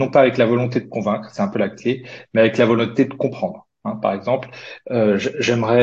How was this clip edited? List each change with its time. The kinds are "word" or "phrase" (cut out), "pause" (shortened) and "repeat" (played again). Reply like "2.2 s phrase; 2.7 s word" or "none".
none

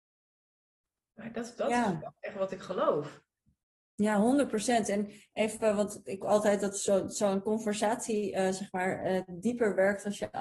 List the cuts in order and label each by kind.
6.2 s phrase

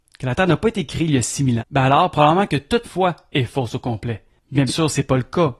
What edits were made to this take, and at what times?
1.6 s word; 2.8 s word; 4.7 s word

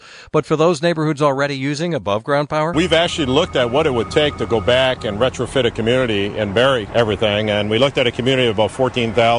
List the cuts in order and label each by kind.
none

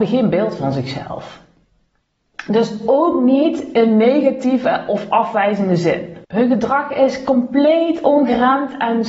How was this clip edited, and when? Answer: 6.2 s pause

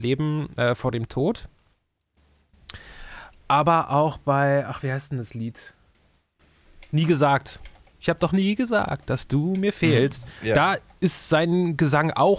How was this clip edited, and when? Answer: none

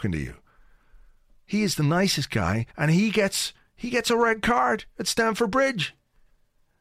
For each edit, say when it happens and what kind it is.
2.7 s pause

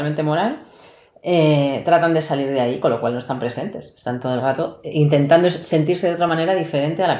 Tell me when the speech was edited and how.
none

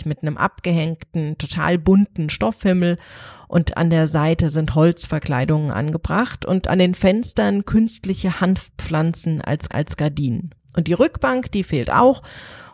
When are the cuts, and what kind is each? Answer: 9.7 s repeat

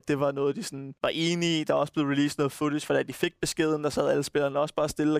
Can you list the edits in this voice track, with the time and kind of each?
1.0 s pause

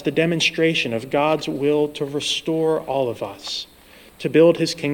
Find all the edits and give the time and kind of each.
none

